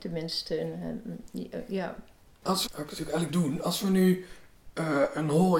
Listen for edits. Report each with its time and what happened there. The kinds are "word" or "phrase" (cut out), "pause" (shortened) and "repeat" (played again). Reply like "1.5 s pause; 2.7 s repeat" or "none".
2.7 s phrase; 3.3 s word

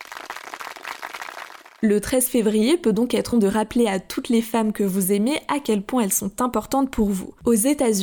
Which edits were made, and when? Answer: 3.3 s word

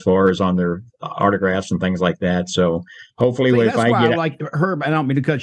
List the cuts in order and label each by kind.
3.1 s pause

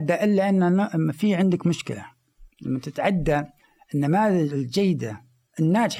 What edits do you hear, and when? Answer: 2.5 s pause

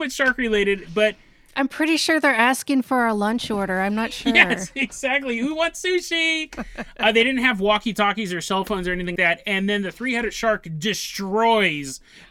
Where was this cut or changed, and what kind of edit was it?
9.2 s word

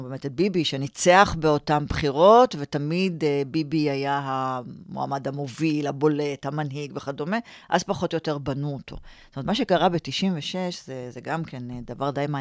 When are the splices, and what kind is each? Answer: none

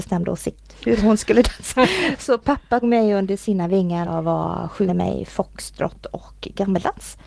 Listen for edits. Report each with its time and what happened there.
2.8 s word; 4.1 s word; 4.9 s phrase

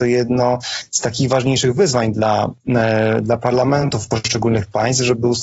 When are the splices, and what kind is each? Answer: none

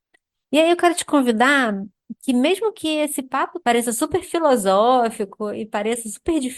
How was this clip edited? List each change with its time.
3.6 s word

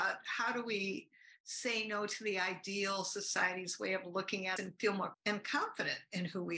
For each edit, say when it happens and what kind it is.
4.6 s word; 5.1 s word

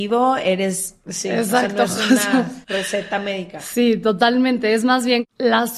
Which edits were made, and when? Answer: 2.6 s pause

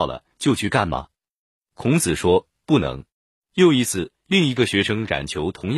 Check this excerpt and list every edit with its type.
3.1 s pause

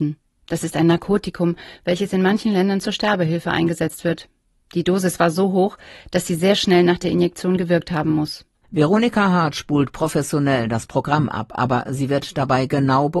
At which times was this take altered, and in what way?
none

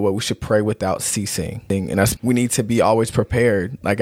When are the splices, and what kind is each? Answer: 2.2 s word

